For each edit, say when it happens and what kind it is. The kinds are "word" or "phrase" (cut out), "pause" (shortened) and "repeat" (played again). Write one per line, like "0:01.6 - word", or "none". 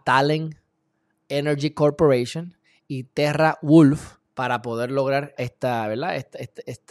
0:04.2 - pause
0:05.4 - word